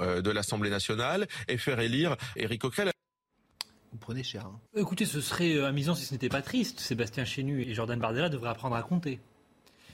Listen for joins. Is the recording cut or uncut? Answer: cut